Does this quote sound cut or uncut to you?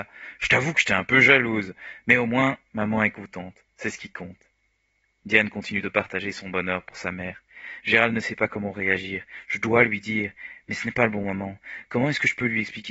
uncut